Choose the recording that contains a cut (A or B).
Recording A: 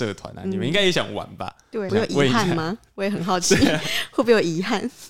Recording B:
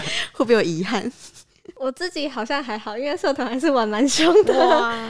A